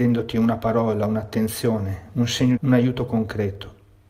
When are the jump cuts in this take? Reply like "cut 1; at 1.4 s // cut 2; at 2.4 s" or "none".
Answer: cut 1; at 2.6 s